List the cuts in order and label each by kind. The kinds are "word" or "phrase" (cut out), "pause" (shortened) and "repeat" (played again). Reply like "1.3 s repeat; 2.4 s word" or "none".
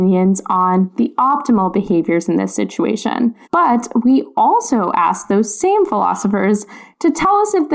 3.4 s pause